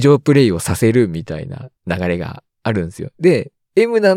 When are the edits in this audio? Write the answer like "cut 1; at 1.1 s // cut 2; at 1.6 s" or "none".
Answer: cut 1; at 1.8 s // cut 2; at 2.5 s